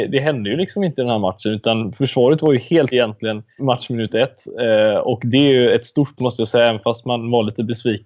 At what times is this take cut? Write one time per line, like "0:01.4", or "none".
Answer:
0:02.9
0:03.6
0:06.2